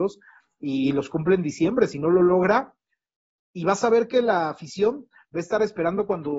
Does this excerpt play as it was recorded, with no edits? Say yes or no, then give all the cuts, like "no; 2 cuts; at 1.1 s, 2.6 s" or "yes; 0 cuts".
yes; 0 cuts